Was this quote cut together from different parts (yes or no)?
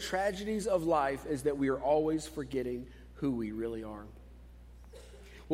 no